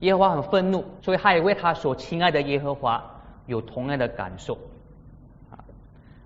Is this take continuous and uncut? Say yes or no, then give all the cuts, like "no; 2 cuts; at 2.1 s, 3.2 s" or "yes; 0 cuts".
no; 1 cut; at 1.0 s